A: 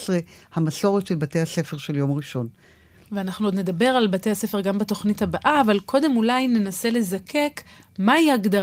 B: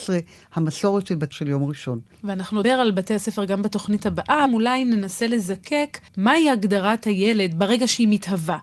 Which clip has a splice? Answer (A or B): B